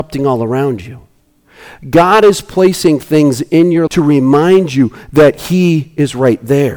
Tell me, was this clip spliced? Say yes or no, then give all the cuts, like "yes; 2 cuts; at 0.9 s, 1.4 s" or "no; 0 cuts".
yes; 1 cut; at 3.9 s